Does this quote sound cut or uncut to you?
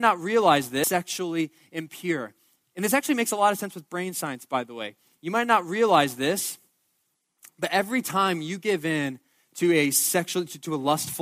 uncut